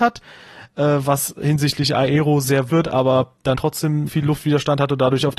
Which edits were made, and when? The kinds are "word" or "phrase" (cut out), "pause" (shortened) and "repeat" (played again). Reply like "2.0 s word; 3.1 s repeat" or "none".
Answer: 2.7 s phrase; 3.5 s word; 4.1 s word